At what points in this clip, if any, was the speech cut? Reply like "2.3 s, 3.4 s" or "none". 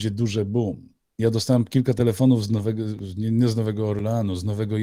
none